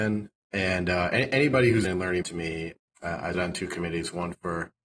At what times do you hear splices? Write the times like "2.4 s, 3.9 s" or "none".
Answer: 1.8 s, 2.2 s, 3.3 s